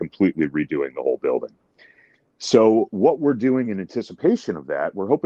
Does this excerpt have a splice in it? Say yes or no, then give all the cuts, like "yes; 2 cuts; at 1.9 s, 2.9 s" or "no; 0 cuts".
no; 0 cuts